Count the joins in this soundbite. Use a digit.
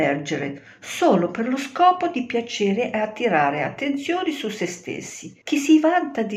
1